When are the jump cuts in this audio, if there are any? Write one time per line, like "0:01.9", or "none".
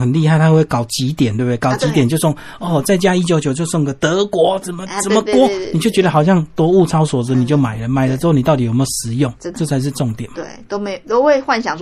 0:09.5